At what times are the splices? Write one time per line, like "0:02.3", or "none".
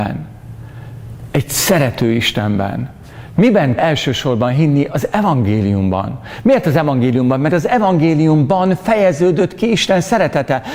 0:03.8